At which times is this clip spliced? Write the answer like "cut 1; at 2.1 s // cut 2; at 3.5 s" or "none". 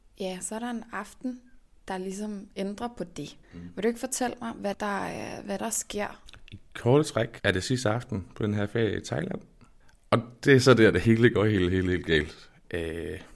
cut 1; at 3.4 s // cut 2; at 4.7 s // cut 3; at 5.6 s // cut 4; at 7.4 s

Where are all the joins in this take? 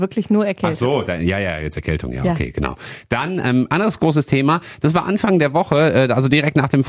cut 1; at 1.8 s

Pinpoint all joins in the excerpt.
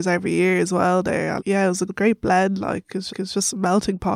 cut 1; at 1.4 s // cut 2; at 1.9 s // cut 3; at 3.1 s

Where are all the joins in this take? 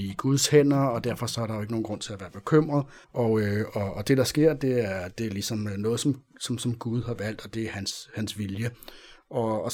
cut 1; at 3.0 s

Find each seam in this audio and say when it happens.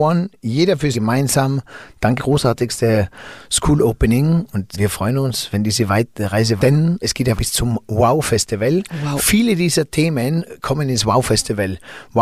cut 1; at 0.9 s // cut 2; at 2.2 s // cut 3; at 4.7 s // cut 4; at 6.6 s // cut 5; at 7.0 s // cut 6; at 7.4 s

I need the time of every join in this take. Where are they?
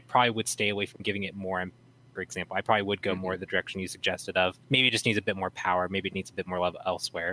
cut 1; at 4.6 s

